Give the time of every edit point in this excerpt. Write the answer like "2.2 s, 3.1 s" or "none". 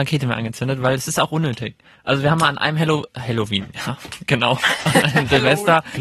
none

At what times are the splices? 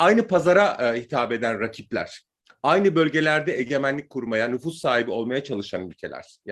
none

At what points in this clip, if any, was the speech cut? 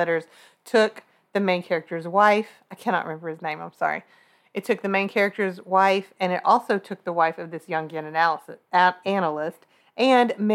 none

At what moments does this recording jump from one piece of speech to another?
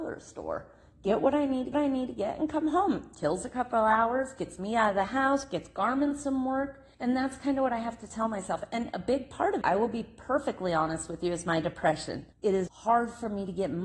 1.7 s, 6.9 s, 9.6 s, 12.3 s, 12.7 s

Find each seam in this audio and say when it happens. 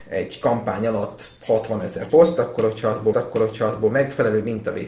2.1 s, 3.1 s

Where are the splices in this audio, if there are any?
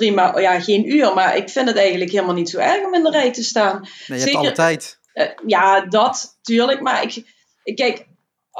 5.1 s

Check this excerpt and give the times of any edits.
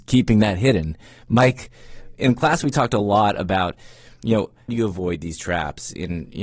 4.7 s

